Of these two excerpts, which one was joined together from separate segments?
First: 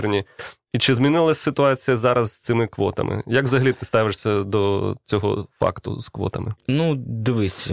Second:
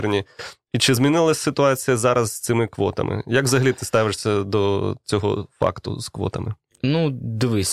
first; 1 cut; at 6.6 s

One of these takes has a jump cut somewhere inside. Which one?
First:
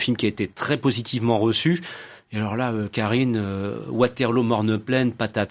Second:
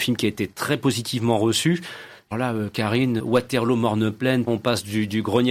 second; 3 cuts; at 2.3 s, 3.2 s, 4.5 s

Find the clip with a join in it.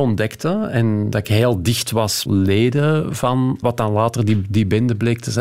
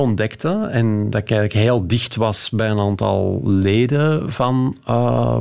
first; 3 cuts; at 1.2 s, 2.3 s, 3.6 s

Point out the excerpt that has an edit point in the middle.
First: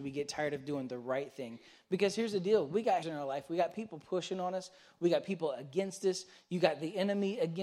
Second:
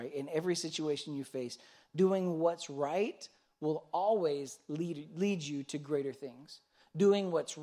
first; 1 cut; at 3.0 s

